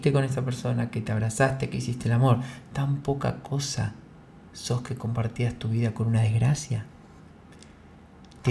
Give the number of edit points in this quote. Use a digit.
0